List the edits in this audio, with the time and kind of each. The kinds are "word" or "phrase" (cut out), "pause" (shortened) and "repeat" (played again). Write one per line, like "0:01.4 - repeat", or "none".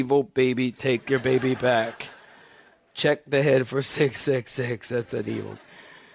none